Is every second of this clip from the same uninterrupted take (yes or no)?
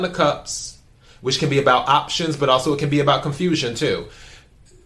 yes